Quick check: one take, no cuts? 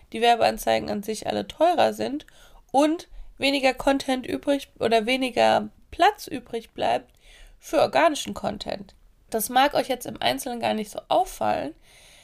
yes; 0 cuts

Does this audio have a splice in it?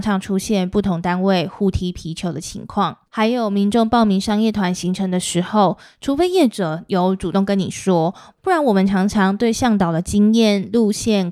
yes; 1 cut; at 3.1 s

